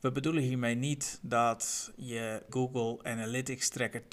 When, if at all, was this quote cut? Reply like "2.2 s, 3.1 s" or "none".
2.5 s